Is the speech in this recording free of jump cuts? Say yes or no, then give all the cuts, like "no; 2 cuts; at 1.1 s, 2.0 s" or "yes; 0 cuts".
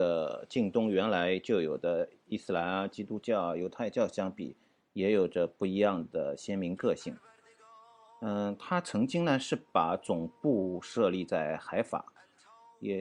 yes; 0 cuts